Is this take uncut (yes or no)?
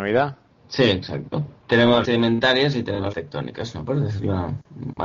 no